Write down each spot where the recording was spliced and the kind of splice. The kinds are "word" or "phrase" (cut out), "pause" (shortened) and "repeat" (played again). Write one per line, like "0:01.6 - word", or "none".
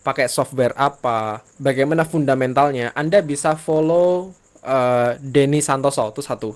0:01.5 - pause